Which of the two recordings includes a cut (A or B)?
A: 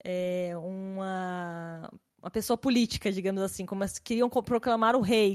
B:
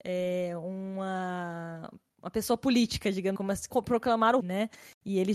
B